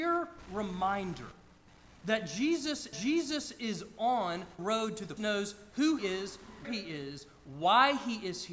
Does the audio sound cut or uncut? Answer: cut